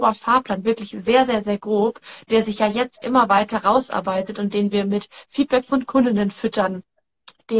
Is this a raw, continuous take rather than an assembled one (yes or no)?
yes